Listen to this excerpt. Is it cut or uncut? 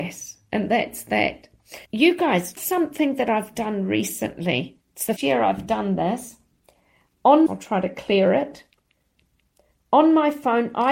cut